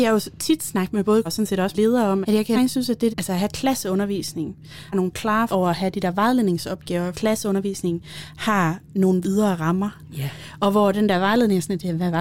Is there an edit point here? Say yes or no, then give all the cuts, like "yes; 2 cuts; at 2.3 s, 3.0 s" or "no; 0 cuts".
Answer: yes; 9 cuts; at 1.2 s, 1.7 s, 2.2 s, 2.5 s, 3.1 s, 4.9 s, 5.5 s, 7.1 s, 9.2 s